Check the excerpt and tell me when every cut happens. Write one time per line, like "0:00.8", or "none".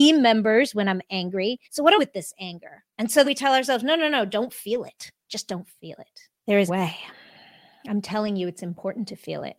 0:01.6
0:02.0
0:02.9
0:03.2
0:05.2
0:06.4
0:06.7